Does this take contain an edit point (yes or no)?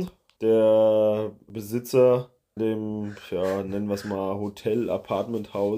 yes